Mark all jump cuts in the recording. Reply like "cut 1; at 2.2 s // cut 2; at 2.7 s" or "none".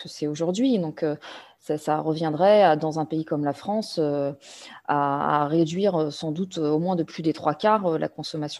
none